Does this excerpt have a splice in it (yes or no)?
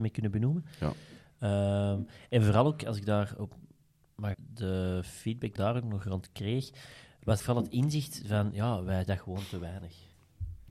yes